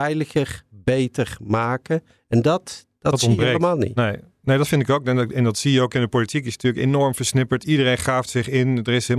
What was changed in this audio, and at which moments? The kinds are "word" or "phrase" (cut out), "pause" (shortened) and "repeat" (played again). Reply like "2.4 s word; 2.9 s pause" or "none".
none